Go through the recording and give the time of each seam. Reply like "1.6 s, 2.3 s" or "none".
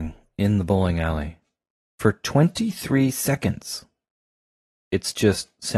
none